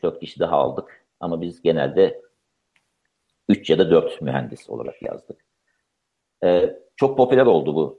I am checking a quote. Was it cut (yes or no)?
no